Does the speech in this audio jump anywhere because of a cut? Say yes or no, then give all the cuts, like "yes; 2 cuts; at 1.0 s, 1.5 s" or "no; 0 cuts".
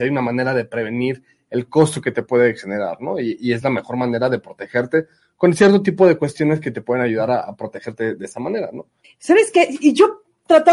no; 0 cuts